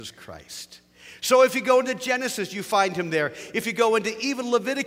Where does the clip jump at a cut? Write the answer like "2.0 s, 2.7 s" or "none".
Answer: none